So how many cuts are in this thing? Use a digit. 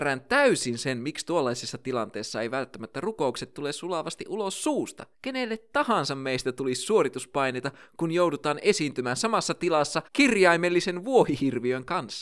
2